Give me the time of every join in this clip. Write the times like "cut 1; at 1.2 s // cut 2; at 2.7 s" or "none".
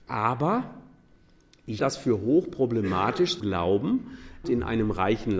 cut 1; at 1.8 s // cut 2; at 3.4 s // cut 3; at 4.4 s